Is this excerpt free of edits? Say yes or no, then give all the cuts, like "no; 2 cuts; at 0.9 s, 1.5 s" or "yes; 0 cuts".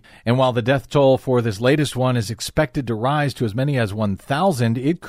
yes; 0 cuts